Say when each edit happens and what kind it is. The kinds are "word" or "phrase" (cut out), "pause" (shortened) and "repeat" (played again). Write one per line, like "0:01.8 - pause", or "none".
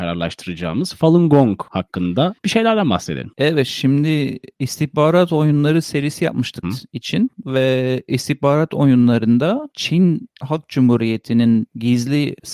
0:06.6 - phrase